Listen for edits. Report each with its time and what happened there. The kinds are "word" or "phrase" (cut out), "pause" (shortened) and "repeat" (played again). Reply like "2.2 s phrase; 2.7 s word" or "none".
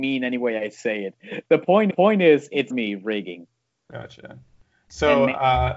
1.9 s repeat; 2.7 s phrase